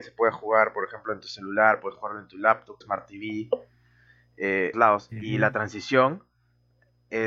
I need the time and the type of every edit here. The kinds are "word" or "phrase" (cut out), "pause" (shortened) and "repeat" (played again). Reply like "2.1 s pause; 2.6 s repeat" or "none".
2.8 s phrase; 4.7 s phrase